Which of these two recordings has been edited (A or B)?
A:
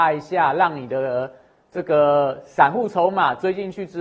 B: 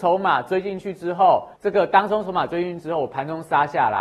B